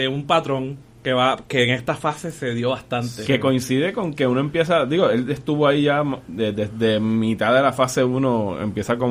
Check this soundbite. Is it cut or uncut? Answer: uncut